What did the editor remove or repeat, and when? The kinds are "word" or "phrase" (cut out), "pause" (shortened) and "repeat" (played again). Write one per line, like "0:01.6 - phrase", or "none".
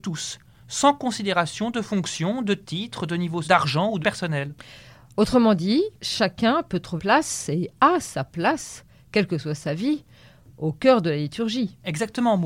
0:03.4 - word
0:04.0 - word
0:06.0 - pause
0:07.0 - word